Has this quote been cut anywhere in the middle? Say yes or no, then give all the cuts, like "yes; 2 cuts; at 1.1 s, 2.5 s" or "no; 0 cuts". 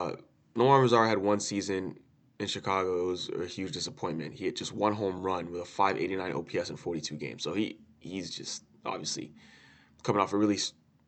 no; 0 cuts